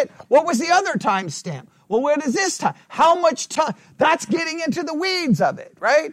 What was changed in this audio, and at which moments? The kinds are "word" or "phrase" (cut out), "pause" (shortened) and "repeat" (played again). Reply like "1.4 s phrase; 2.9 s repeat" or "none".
none